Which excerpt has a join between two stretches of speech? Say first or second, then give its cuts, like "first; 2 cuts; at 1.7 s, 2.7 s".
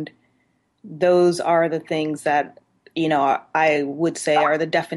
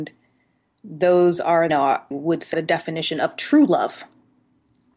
second; 3 cuts; at 1.7 s, 2.1 s, 2.5 s